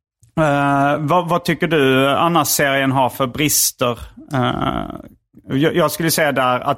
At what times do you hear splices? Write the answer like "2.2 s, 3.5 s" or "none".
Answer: none